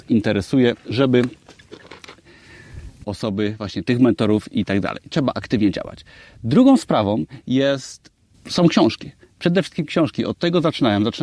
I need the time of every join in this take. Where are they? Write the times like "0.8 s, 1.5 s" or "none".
3.0 s, 8.3 s